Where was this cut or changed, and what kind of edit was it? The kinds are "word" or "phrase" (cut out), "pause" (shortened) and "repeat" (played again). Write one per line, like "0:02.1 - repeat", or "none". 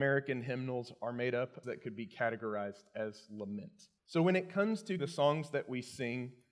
0:01.6 - phrase
0:04.0 - pause
0:05.0 - word